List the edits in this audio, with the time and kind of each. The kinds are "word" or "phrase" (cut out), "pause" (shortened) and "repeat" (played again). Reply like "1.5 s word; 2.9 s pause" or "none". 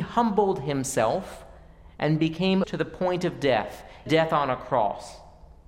2.6 s word; 4.1 s word